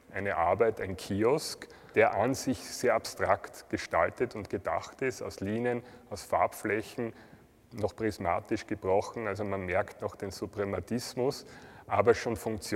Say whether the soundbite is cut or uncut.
uncut